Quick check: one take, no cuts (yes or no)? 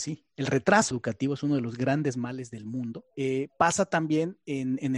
no